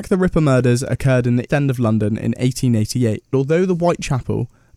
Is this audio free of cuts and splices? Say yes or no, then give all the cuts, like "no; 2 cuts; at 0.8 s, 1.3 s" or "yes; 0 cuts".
no; 2 cuts; at 1.5 s, 3.3 s